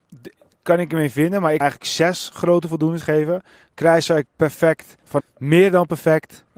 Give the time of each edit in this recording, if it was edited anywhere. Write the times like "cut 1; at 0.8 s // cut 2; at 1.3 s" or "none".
cut 1; at 1.6 s // cut 2; at 3.0 s // cut 3; at 4.3 s // cut 4; at 5.2 s